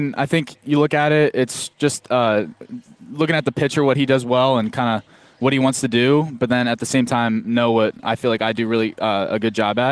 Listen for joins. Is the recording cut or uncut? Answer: uncut